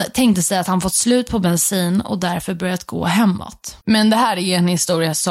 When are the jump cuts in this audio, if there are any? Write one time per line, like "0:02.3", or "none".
0:03.8